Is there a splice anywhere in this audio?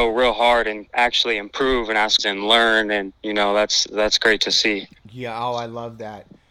yes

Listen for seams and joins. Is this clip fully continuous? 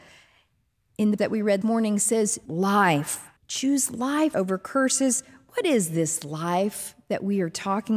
no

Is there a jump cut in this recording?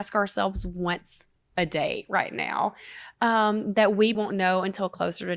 yes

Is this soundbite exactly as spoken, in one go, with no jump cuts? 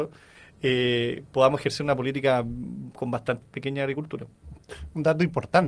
no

